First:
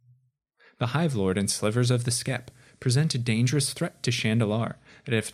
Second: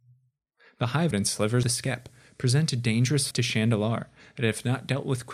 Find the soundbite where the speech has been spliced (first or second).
second